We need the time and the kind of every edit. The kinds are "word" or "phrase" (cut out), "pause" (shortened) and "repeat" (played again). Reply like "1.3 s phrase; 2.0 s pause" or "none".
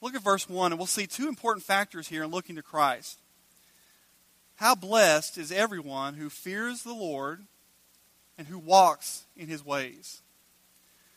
none